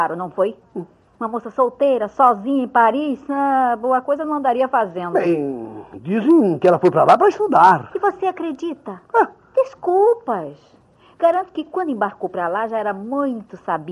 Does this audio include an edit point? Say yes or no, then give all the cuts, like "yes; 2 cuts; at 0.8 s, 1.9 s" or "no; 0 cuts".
no; 0 cuts